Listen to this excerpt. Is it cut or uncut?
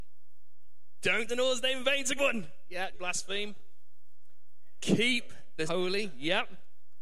cut